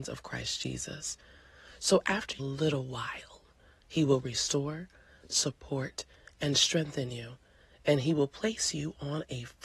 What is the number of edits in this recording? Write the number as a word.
one